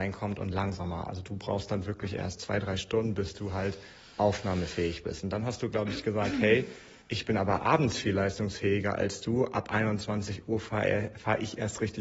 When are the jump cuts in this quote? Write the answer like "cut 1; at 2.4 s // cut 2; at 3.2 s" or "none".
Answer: cut 1; at 7.0 s